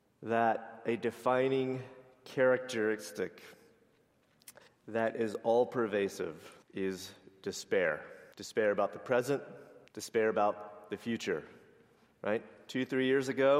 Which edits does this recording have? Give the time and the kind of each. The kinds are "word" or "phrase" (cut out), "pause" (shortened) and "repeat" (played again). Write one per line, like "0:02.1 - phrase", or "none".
0:04.7 - pause
0:06.6 - pause
0:08.3 - pause
0:09.9 - pause